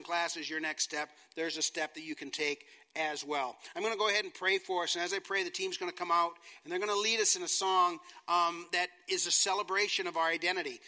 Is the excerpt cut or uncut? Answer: uncut